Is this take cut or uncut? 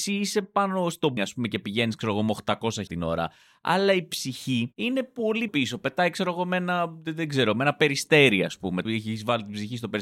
cut